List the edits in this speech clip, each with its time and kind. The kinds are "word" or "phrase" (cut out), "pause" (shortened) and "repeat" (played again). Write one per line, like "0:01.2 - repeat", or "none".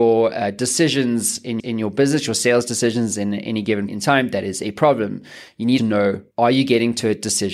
0:01.6 - repeat
0:03.9 - word
0:05.8 - phrase
0:06.3 - pause